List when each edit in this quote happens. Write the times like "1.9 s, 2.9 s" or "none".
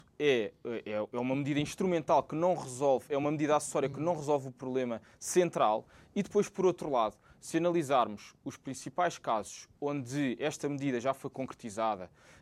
none